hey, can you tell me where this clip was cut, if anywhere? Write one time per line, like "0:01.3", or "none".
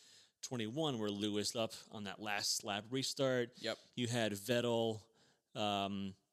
0:01.5